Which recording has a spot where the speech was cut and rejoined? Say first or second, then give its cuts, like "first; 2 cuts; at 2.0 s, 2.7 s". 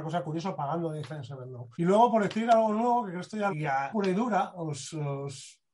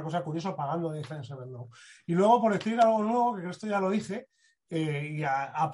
first; 3 cuts; at 1.7 s, 3.5 s, 3.9 s